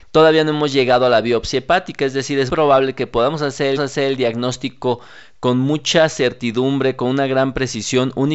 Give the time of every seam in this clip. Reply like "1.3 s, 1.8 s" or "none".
2.5 s, 3.7 s